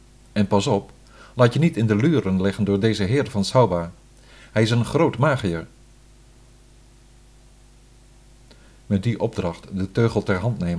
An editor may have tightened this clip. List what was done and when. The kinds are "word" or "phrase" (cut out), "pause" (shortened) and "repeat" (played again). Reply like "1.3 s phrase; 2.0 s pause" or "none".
none